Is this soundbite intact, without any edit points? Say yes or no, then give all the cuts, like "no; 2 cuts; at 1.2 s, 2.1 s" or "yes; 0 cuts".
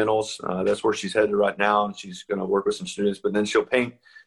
yes; 0 cuts